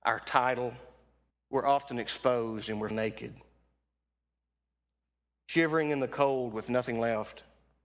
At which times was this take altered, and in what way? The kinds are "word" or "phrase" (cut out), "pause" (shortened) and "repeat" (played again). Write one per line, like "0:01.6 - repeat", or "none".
0:01.3 - pause
0:02.9 - word